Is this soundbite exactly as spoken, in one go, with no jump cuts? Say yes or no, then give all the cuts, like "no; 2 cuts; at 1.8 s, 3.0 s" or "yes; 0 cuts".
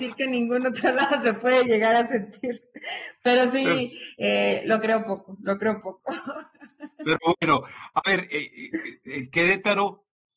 yes; 0 cuts